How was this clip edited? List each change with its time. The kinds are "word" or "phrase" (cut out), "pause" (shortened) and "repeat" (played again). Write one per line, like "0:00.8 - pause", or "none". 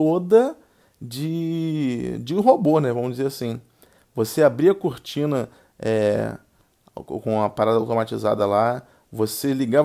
none